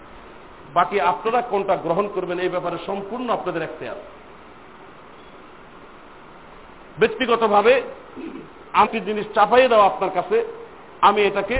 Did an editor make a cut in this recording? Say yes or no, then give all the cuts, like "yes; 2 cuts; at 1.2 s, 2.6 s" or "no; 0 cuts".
yes; 1 cut; at 8.9 s